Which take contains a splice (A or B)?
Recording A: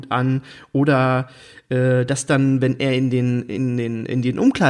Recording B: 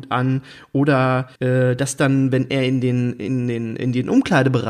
B